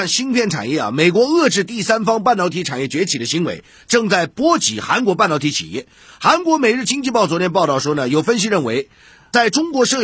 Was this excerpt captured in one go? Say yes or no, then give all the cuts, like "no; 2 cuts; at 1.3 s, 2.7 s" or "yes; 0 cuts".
yes; 0 cuts